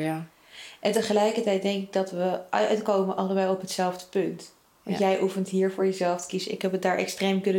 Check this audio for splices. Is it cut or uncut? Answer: uncut